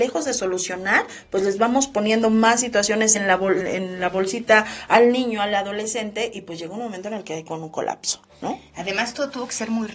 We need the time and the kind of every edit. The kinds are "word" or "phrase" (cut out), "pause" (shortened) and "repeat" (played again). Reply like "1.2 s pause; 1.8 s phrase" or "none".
3.1 s word; 3.6 s word